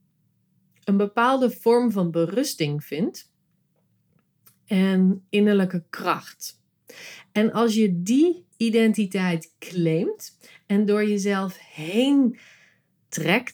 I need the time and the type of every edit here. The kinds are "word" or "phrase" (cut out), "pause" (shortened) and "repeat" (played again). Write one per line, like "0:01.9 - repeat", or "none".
none